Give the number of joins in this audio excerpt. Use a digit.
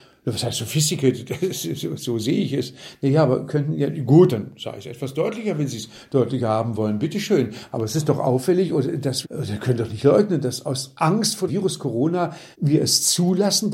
4